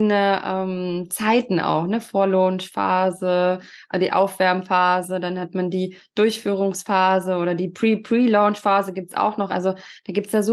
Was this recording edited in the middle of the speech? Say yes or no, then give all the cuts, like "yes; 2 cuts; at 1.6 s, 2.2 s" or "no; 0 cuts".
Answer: no; 0 cuts